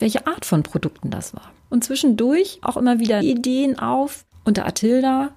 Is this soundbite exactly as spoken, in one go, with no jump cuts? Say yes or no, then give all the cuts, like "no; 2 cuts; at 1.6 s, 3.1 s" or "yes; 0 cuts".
no; 4 cuts; at 1.6 s, 2.6 s, 3.2 s, 4.3 s